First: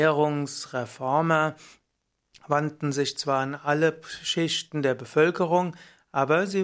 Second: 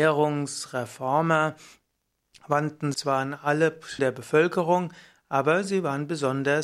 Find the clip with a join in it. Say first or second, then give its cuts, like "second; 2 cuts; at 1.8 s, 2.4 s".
second; 2 cuts; at 2.9 s, 4.0 s